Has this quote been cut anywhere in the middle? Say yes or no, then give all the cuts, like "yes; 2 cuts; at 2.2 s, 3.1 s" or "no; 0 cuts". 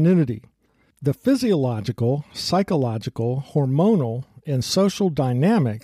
no; 0 cuts